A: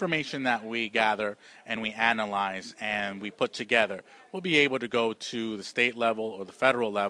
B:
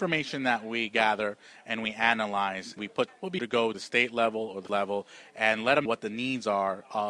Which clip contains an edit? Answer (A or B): B